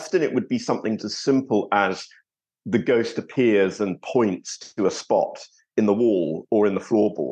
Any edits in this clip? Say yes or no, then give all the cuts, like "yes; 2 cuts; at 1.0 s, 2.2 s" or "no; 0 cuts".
yes; 1 cut; at 1.0 s